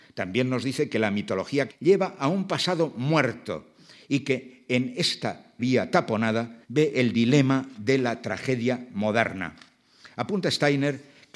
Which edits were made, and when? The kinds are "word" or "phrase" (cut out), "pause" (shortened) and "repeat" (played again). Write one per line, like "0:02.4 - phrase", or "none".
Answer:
0:01.7 - word
0:05.6 - word
0:06.6 - pause

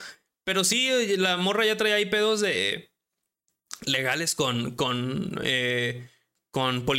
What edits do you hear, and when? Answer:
none

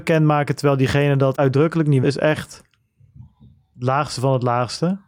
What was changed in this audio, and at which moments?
0:01.3 - word
0:02.0 - word

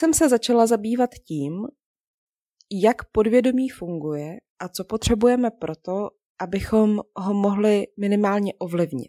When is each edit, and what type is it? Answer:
none

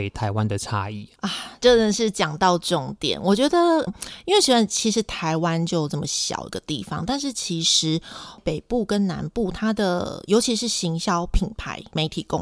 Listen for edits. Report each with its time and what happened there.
0:03.9 - word

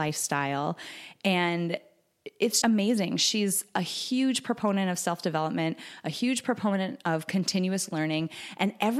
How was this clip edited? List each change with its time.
0:02.6 - word

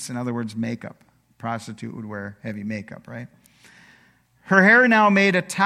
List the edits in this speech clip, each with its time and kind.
none

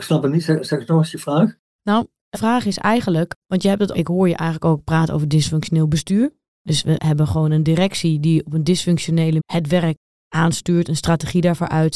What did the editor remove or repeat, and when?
0:02.3 - word
0:03.4 - pause
0:03.9 - phrase
0:09.4 - word

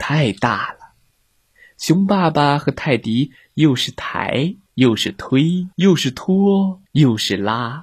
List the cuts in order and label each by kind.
0:01.1 - pause
0:04.7 - pause
0:05.7 - pause
0:06.9 - pause

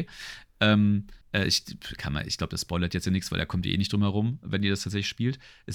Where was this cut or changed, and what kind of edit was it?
0:01.2 - pause

